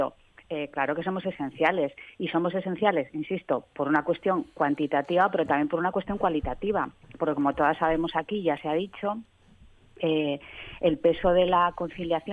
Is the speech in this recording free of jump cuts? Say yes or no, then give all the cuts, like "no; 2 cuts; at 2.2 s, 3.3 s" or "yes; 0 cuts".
yes; 0 cuts